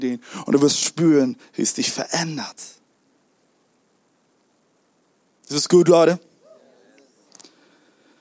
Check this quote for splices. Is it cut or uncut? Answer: uncut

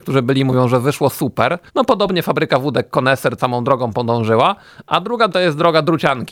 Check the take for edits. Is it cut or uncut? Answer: cut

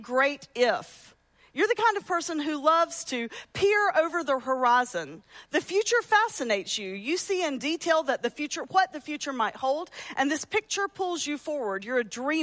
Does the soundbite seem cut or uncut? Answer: uncut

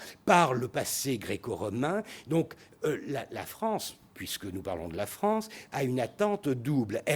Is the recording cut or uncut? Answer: uncut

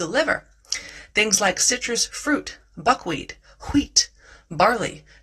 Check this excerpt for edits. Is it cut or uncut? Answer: uncut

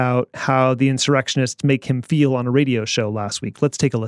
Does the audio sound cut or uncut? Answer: uncut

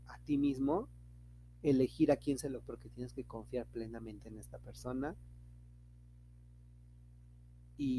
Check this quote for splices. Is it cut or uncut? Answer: cut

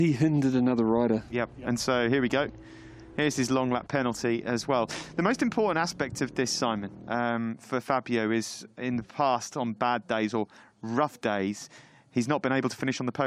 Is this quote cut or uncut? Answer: uncut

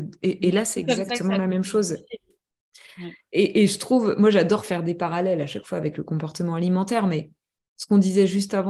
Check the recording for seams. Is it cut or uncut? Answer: uncut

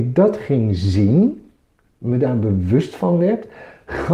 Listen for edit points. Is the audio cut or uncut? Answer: uncut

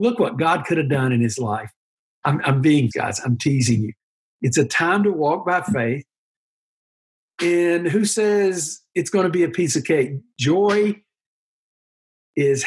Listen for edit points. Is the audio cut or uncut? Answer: cut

